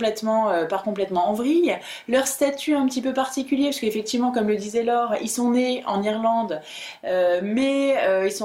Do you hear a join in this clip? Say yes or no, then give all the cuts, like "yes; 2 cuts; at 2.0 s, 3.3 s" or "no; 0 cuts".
no; 0 cuts